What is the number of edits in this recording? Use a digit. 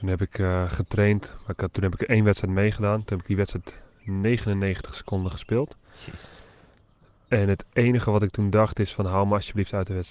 1